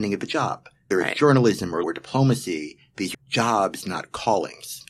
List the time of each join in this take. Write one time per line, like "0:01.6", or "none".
0:00.9
0:01.8
0:03.1